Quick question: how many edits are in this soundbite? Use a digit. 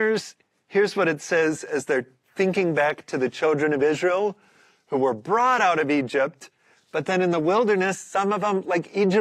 0